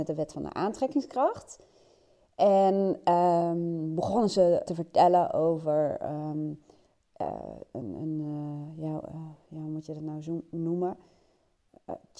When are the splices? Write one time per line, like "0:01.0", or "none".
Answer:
0:04.7

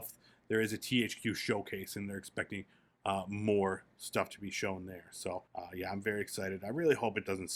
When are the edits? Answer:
0:05.5

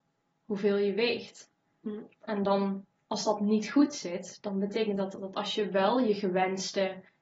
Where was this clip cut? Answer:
none

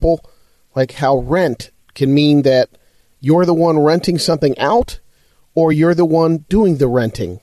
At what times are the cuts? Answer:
none

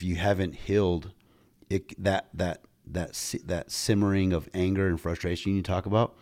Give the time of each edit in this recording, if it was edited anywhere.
none

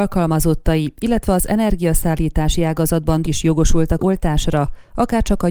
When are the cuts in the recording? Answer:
0:03.2
0:04.0

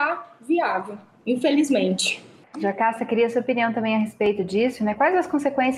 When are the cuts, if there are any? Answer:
none

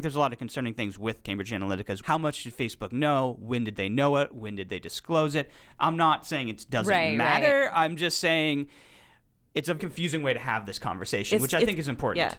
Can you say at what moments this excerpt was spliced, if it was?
0:02.0
0:09.8

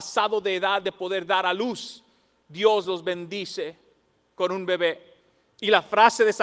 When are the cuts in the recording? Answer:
none

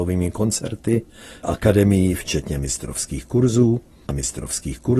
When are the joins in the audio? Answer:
0:01.4
0:04.1

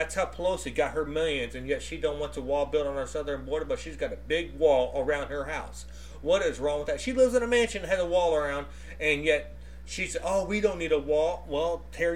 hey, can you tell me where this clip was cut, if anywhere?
none

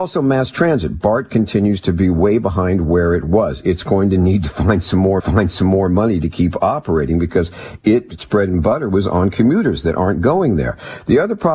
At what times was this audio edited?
0:05.2

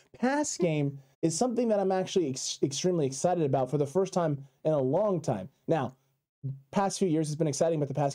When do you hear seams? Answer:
0:01.1

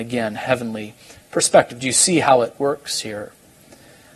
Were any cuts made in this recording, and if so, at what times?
none

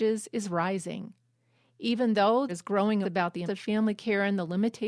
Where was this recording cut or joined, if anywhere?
0:02.5
0:03.0
0:03.5

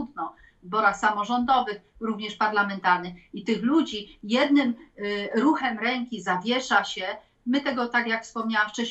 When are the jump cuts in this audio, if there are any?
none

